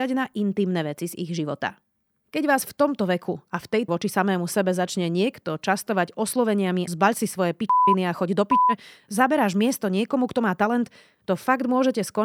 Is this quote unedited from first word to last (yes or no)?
no